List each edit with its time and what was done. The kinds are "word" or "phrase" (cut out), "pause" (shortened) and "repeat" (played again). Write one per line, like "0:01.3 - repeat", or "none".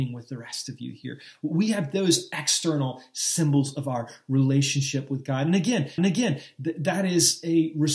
0:06.0 - repeat